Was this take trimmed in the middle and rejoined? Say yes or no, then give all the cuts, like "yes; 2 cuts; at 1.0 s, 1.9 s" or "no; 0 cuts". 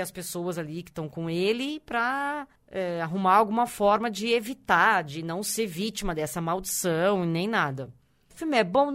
yes; 1 cut; at 2.6 s